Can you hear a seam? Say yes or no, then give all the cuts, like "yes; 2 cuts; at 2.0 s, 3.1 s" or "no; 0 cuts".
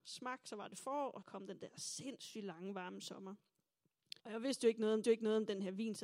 yes; 3 cuts; at 1.2 s, 4.2 s, 5.0 s